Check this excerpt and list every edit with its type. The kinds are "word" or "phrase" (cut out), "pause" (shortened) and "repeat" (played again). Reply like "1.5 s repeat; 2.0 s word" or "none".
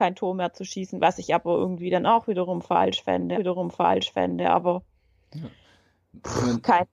3.3 s repeat